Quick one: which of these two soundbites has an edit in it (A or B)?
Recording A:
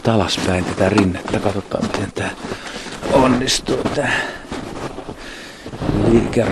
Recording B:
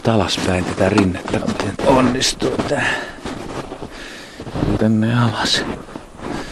B